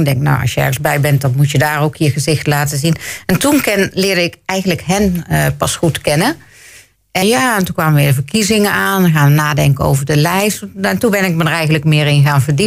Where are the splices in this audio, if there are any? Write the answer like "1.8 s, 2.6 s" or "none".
7.2 s